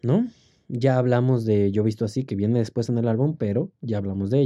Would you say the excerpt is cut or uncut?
uncut